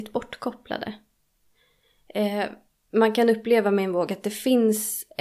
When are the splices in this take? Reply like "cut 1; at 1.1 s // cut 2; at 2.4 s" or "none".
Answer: none